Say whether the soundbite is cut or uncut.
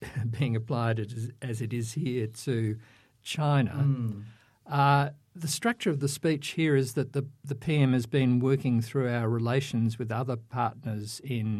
uncut